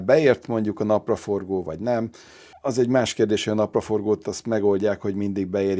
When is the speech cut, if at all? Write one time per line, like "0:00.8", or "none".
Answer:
none